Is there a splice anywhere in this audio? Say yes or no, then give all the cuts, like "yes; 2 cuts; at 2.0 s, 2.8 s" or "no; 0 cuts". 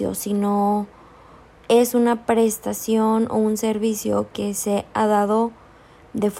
no; 0 cuts